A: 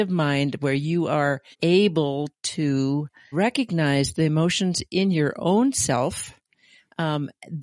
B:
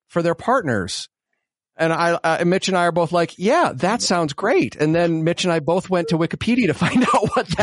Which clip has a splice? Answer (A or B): A